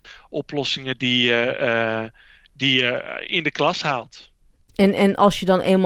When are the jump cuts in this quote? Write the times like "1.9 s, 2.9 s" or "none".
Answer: none